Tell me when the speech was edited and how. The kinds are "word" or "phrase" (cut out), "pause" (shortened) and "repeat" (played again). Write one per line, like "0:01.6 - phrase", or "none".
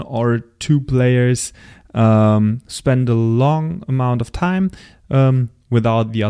none